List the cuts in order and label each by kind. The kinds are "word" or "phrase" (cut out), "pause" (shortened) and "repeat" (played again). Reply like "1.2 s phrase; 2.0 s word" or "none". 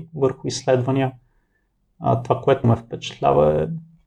2.6 s word